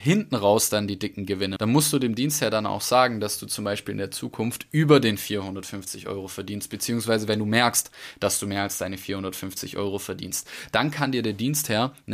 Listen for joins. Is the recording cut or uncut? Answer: cut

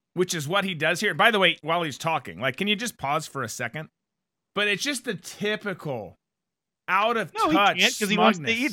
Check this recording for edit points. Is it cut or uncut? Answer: cut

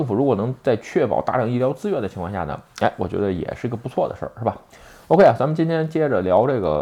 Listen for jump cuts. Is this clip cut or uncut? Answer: uncut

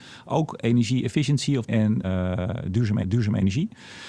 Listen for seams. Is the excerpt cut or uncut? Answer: cut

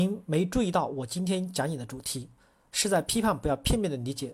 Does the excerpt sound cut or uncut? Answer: uncut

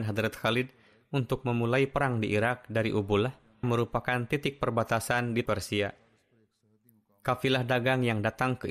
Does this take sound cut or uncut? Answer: cut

